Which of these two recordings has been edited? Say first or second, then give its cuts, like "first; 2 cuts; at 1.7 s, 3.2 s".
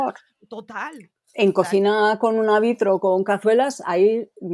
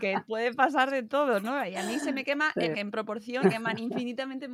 second; 2 cuts; at 2.7 s, 3.4 s